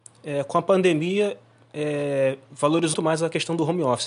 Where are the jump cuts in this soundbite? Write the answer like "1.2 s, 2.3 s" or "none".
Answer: 2.9 s